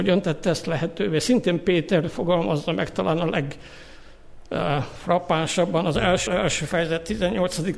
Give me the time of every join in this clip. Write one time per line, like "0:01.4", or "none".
0:06.3